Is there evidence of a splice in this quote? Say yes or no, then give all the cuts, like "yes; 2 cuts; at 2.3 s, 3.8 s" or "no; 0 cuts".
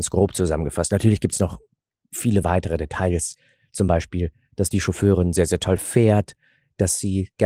no; 0 cuts